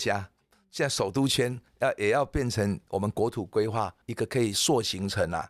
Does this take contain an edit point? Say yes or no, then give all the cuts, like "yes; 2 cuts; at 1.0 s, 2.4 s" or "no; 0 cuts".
yes; 2 cuts; at 1.7 s, 4.0 s